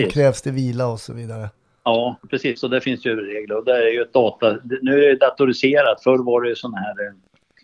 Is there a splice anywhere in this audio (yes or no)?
no